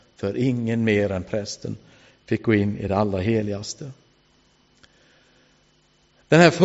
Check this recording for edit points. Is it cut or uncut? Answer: uncut